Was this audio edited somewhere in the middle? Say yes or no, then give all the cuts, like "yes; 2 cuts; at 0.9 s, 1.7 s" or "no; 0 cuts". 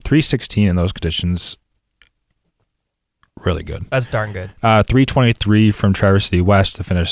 no; 0 cuts